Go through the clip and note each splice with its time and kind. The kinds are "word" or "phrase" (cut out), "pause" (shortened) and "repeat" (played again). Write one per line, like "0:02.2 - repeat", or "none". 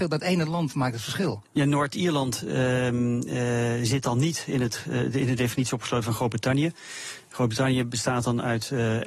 none